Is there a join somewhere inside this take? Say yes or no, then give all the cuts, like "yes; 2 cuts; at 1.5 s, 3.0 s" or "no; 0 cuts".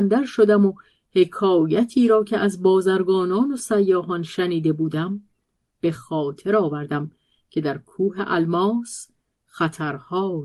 no; 0 cuts